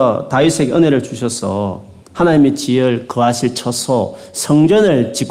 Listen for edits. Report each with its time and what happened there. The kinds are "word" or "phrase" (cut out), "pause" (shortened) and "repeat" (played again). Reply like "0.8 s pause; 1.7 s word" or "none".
none